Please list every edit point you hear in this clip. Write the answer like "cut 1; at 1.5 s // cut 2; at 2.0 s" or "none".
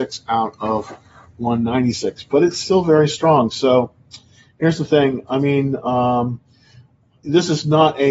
none